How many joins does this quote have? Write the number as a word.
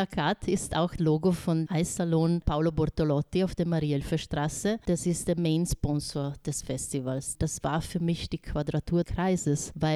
three